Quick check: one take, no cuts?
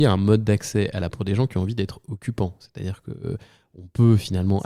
no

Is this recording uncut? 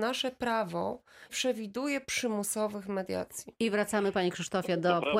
no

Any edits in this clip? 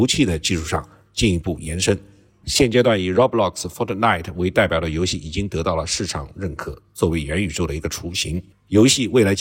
no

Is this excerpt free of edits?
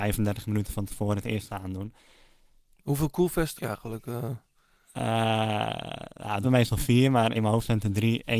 no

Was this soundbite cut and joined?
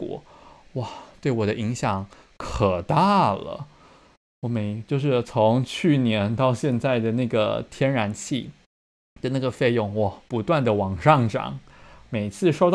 no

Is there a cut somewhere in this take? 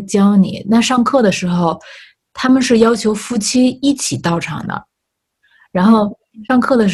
no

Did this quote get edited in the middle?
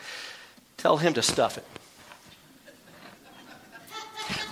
no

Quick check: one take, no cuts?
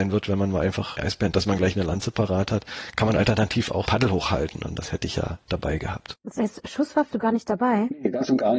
no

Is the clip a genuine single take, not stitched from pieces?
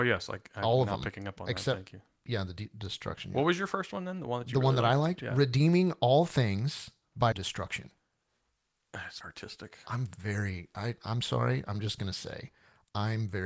no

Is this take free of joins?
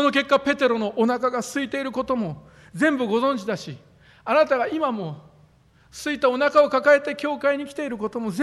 yes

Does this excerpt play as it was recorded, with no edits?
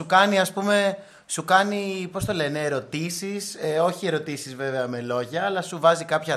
yes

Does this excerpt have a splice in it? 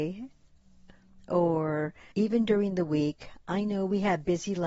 yes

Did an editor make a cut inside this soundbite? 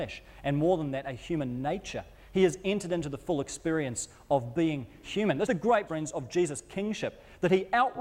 yes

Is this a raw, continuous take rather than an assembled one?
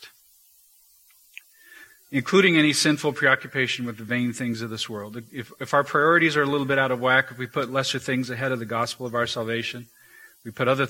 yes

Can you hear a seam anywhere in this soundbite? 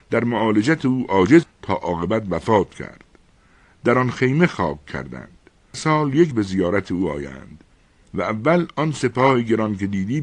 yes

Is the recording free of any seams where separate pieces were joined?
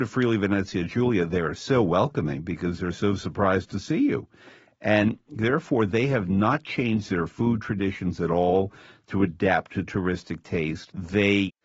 yes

